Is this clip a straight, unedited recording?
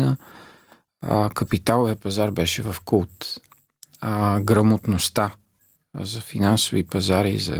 yes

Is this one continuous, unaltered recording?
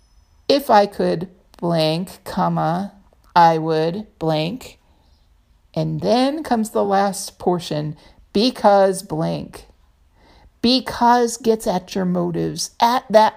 yes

